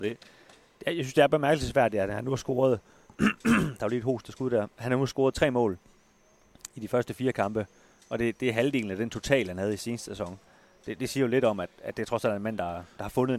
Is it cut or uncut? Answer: uncut